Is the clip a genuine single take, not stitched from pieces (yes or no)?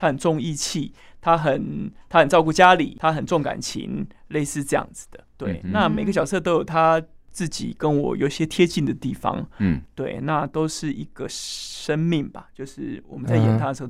yes